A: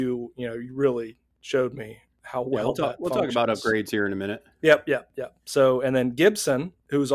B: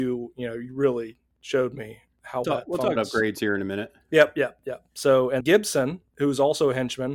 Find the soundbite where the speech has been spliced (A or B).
B